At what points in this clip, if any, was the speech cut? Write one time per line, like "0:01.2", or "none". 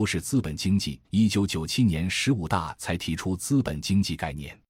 0:01.0